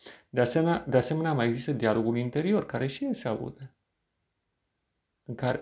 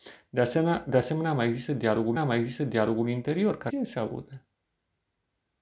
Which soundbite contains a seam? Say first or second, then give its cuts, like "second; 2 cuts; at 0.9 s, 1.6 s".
second; 2 cuts; at 2.2 s, 3.7 s